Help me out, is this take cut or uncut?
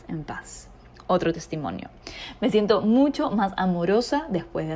uncut